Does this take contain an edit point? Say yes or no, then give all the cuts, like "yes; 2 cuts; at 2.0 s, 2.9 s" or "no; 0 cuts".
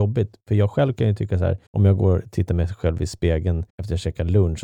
yes; 2 cuts; at 1.7 s, 3.7 s